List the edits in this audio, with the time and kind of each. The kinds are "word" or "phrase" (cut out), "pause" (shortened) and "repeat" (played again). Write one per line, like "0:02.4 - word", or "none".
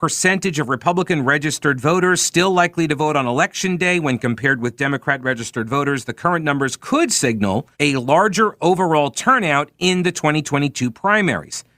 0:07.7 - pause